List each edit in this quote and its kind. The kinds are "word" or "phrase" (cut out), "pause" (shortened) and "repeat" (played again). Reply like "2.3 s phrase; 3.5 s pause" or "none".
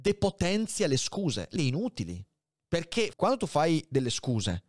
1.6 s word; 3.1 s word